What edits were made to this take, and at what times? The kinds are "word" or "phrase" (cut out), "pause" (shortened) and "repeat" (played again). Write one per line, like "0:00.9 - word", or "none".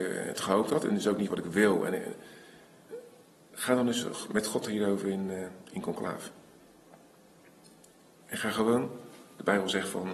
none